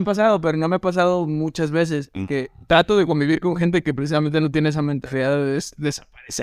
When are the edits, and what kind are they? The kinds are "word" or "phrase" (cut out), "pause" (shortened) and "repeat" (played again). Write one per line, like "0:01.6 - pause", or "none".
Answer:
none